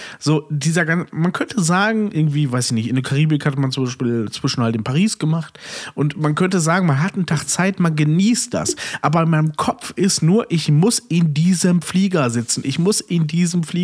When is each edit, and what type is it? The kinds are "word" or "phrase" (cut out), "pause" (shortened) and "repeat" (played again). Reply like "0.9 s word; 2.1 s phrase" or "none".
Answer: none